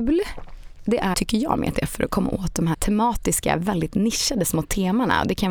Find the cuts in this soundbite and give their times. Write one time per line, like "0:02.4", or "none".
0:01.1
0:02.7